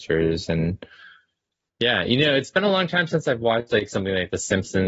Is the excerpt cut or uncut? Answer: uncut